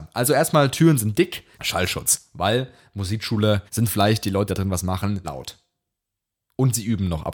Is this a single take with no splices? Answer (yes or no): no